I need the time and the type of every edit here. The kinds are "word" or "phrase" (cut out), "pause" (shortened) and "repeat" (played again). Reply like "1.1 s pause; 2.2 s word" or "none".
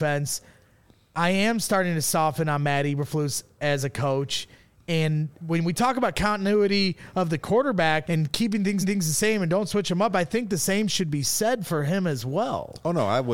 8.0 s word; 8.8 s repeat